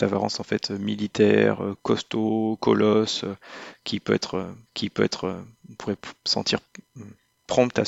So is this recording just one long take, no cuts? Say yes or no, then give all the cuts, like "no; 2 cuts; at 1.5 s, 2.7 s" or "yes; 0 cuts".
no; 2 cuts; at 4.7 s, 6.2 s